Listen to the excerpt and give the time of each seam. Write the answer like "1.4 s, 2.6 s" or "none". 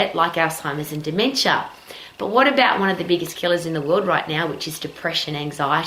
none